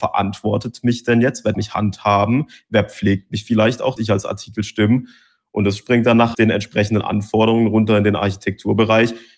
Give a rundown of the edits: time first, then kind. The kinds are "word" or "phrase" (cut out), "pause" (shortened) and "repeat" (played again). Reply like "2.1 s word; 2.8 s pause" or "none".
1.5 s word; 4.0 s word; 6.3 s word